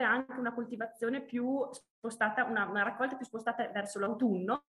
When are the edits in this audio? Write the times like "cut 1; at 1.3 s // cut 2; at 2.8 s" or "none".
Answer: none